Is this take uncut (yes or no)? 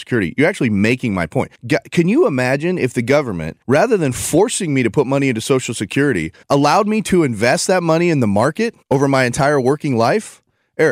no